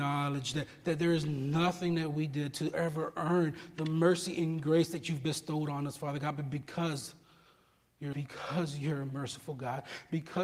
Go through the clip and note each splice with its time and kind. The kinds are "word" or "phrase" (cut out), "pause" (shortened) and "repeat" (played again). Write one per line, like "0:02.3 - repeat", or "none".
0:08.1 - word